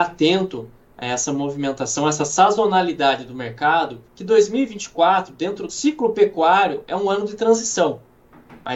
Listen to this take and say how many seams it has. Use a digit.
2